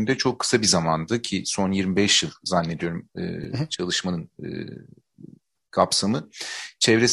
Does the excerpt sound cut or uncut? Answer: uncut